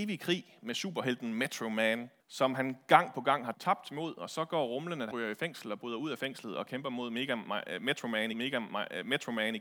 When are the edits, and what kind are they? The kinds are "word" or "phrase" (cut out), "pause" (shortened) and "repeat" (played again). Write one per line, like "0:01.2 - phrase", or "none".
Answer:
0:02.2 - pause
0:03.5 - word
0:05.1 - word
0:08.3 - repeat